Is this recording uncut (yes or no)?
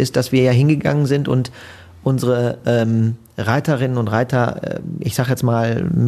yes